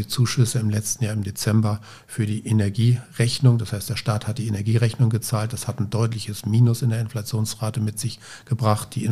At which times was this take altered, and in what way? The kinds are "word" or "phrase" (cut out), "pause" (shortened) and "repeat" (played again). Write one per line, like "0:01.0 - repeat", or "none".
none

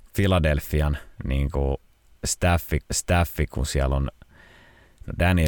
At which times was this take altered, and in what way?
0:01.1 - pause
0:02.8 - repeat

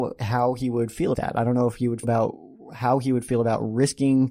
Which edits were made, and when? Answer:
0:01.1 - word
0:02.0 - word

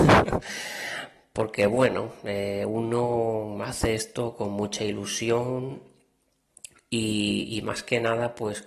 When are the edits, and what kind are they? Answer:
none

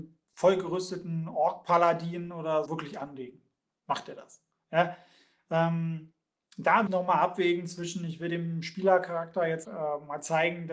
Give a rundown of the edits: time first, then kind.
0:02.7 - word
0:06.9 - word
0:09.6 - word

